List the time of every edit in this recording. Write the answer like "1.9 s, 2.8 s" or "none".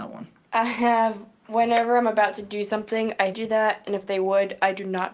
3.3 s